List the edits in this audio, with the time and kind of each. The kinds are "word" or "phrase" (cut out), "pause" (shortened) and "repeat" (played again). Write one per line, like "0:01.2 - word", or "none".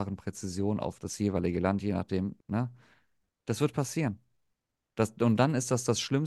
0:02.4 - pause